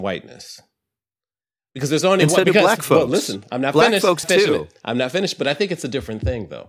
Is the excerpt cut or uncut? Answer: cut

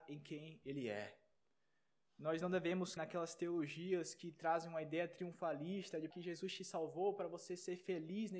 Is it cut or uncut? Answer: cut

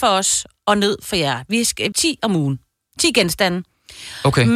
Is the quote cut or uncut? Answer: cut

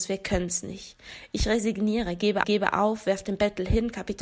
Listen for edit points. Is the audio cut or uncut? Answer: cut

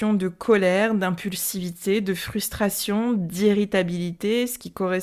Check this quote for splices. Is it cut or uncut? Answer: uncut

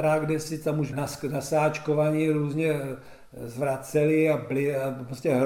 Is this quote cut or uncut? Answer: cut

